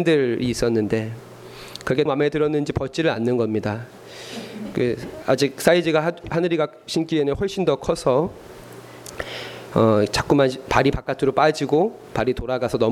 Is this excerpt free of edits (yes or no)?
no